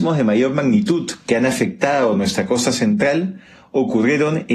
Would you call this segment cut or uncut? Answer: uncut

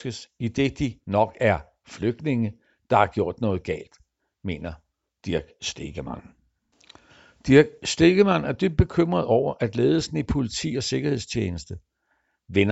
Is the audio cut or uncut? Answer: uncut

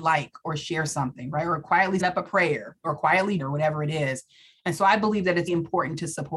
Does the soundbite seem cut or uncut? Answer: cut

